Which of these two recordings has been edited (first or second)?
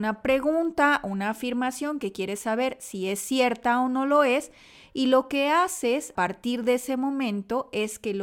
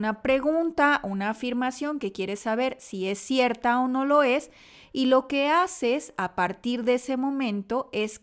first